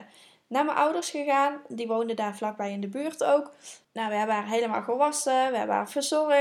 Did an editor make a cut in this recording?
no; 0 cuts

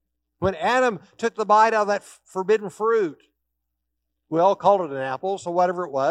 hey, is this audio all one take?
yes; 0 cuts

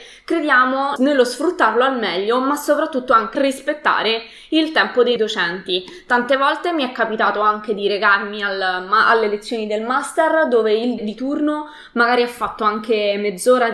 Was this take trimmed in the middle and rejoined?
yes; 4 cuts; at 1.0 s, 3.3 s, 5.2 s, 11.0 s

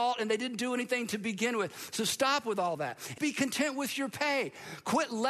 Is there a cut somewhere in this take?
yes; 1 cut; at 3.2 s

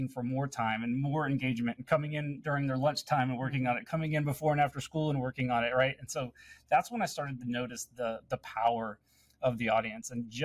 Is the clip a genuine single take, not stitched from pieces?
yes; 0 cuts

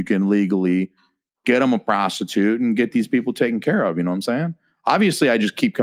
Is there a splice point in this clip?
no; 0 cuts

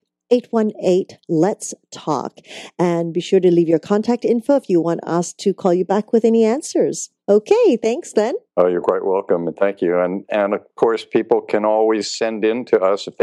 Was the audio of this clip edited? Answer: yes; 2 cuts; at 7.2 s, 8.5 s

